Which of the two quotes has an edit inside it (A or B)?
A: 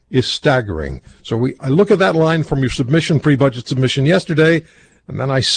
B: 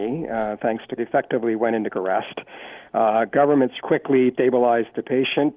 B